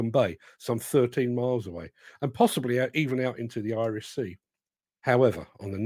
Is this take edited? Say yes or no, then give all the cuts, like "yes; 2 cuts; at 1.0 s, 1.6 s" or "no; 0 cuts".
no; 0 cuts